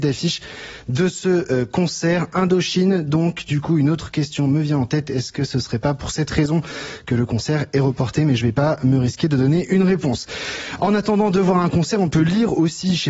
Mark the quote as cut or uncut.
uncut